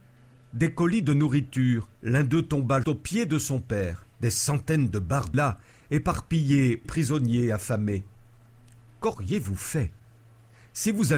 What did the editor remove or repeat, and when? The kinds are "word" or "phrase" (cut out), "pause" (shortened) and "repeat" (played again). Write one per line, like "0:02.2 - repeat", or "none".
0:02.0 - pause
0:02.8 - word
0:04.1 - pause
0:05.3 - phrase
0:06.8 - phrase